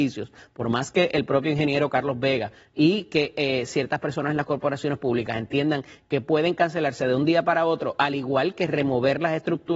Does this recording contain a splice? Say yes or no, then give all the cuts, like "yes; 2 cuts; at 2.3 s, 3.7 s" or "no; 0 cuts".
no; 0 cuts